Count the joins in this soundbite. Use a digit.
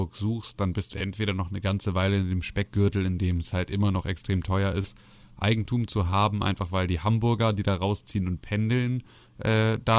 1